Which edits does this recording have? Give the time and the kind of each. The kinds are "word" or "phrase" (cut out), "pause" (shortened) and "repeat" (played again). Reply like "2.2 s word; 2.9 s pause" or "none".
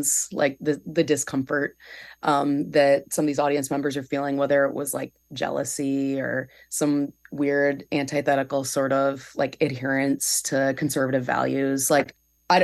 5.2 s pause